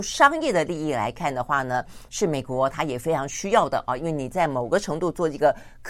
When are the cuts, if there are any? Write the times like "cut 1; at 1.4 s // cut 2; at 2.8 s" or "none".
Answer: none